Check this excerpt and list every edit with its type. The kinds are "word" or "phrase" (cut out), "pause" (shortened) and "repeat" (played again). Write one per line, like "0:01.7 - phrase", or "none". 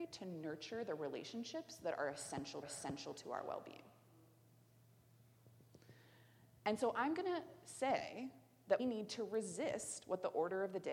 0:02.6 - repeat
0:08.8 - word